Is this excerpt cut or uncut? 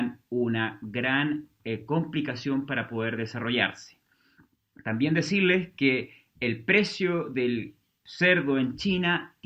uncut